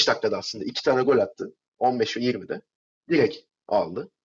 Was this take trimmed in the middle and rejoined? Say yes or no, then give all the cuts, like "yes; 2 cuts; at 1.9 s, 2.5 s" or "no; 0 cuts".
no; 0 cuts